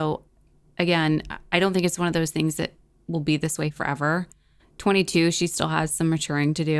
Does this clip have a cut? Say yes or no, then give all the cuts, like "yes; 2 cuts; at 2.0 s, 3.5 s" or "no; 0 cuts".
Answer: no; 0 cuts